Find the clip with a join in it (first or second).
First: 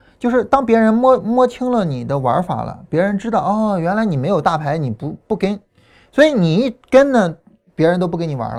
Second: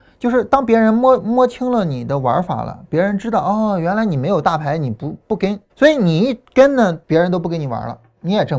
second